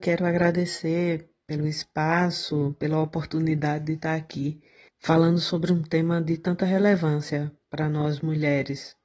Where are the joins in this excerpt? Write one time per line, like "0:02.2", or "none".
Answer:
0:04.9